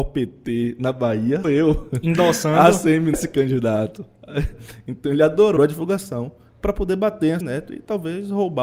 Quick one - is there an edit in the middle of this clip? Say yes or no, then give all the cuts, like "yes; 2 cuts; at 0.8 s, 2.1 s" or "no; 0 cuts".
yes; 4 cuts; at 1.4 s, 3.1 s, 5.6 s, 7.4 s